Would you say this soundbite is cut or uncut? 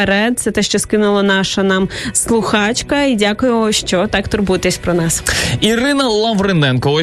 uncut